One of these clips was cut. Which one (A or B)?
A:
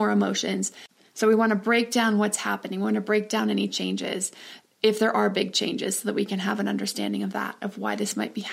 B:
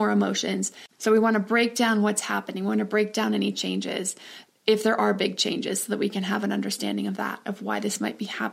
B